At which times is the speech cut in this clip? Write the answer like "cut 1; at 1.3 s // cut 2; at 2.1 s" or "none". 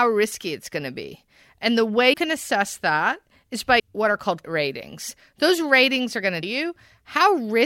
cut 1; at 2.1 s // cut 2; at 3.8 s // cut 3; at 4.4 s // cut 4; at 6.4 s